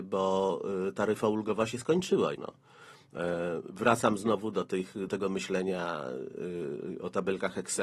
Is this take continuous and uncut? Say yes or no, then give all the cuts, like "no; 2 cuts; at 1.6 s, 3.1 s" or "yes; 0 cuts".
no; 2 cuts; at 2.4 s, 5.1 s